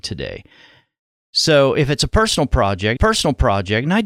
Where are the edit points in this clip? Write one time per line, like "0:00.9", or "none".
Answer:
0:03.0